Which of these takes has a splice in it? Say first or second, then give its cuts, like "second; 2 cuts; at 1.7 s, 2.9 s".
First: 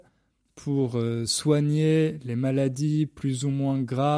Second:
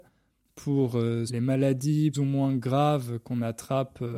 second; 2 cuts; at 1.3 s, 2.1 s